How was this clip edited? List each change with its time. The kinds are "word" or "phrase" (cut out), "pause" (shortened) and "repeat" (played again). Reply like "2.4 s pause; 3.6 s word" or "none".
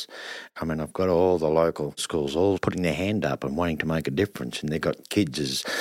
none